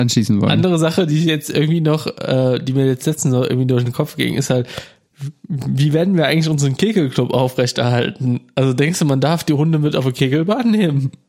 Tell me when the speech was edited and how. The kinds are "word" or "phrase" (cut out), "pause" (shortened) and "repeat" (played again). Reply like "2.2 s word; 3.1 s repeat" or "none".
none

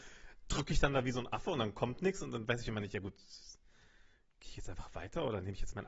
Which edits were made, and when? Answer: none

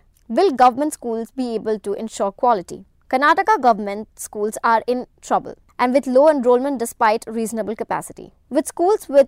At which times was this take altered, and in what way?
none

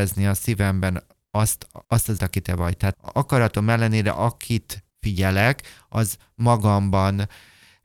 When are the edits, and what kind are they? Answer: 1.8 s pause; 2.2 s word; 2.9 s word; 4.9 s pause

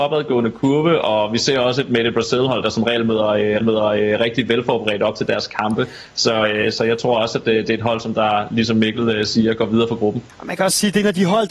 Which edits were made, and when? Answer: 3.6 s repeat; 10.3 s pause

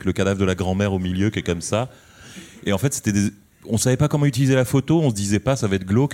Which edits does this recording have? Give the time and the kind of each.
none

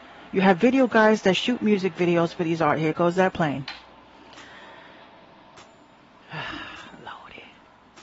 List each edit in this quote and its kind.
none

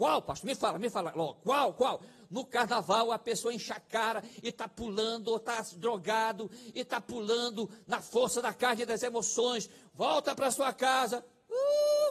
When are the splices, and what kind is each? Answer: none

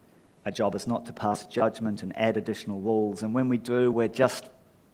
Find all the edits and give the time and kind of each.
3.9 s word

